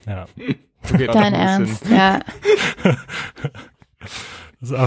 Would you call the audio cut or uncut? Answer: cut